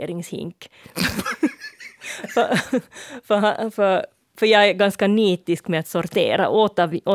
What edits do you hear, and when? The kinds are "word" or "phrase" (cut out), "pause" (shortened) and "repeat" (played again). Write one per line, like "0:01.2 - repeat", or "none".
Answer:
none